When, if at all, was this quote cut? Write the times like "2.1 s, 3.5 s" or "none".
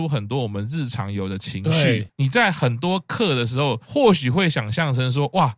2.1 s